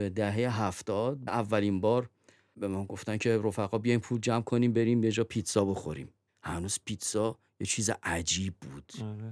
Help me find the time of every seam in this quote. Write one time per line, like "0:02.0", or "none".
0:01.3
0:06.3